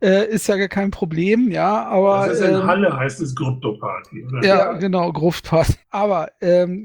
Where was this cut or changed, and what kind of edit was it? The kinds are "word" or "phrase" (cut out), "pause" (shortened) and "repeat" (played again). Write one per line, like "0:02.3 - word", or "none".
0:05.8 - pause